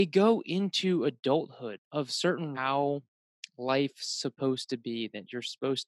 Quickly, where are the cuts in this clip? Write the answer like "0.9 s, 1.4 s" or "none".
1.8 s, 2.5 s